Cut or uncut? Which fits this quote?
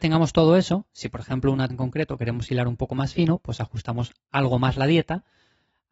cut